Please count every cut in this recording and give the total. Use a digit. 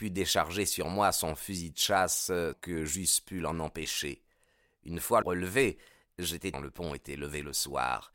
3